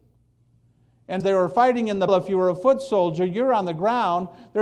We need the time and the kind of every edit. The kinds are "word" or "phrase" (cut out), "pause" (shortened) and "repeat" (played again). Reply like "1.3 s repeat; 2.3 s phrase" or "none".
1.2 s word; 2.1 s word